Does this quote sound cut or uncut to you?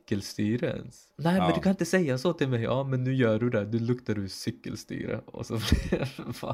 cut